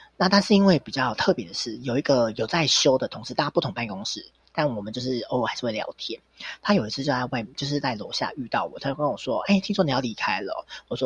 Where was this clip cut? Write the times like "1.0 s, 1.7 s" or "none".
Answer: none